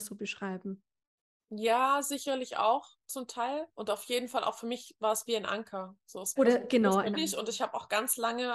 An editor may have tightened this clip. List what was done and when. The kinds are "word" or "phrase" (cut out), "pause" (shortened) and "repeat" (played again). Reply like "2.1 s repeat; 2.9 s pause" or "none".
3.7 s pause; 6.4 s word; 7.1 s phrase